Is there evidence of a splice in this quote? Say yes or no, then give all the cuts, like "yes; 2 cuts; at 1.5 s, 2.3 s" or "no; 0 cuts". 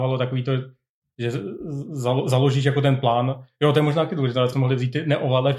yes; 1 cut; at 4.5 s